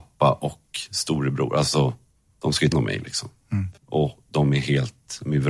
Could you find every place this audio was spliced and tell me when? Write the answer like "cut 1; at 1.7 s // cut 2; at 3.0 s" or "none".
cut 1; at 2.1 s // cut 2; at 2.7 s // cut 3; at 3.8 s